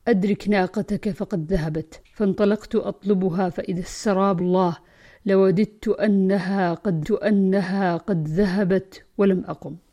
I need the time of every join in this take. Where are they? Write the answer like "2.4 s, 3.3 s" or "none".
2.1 s, 4.4 s, 7.0 s